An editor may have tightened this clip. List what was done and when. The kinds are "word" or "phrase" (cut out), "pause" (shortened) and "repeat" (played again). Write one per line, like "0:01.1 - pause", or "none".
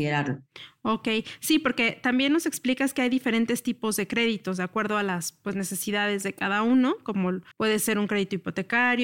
0:07.5 - pause